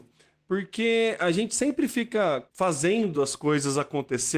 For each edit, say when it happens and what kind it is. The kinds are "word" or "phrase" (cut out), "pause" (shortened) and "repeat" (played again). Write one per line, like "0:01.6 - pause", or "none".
none